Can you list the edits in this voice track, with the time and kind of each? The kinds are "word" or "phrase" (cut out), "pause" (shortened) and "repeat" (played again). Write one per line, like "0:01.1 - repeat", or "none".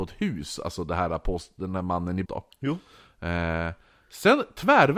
0:02.2 - word